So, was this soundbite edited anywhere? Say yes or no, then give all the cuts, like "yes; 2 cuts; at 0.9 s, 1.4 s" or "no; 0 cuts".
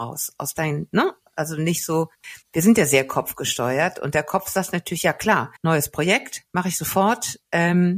yes; 2 cuts; at 2.4 s, 5.6 s